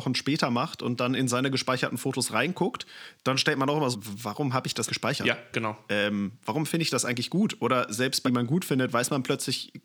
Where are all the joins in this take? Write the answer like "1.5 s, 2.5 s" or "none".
3.9 s, 4.9 s, 5.5 s, 8.2 s